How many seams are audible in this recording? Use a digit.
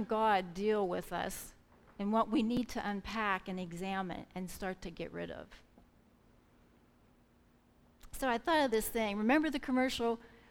0